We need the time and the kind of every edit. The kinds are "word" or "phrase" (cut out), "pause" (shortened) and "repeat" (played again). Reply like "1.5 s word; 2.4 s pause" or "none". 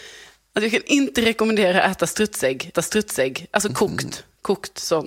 2.7 s repeat